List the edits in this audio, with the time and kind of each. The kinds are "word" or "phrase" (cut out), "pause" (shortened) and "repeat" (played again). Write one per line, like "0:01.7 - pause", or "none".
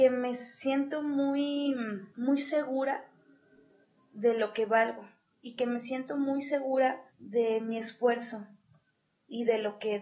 0:02.1 - pause
0:05.3 - pause
0:07.1 - pause